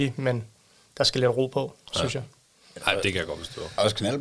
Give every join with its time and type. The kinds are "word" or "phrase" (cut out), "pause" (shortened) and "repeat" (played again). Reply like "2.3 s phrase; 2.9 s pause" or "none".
none